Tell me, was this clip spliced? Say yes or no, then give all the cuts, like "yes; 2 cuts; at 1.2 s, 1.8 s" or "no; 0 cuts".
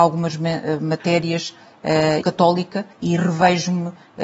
yes; 2 cuts; at 2.2 s, 2.9 s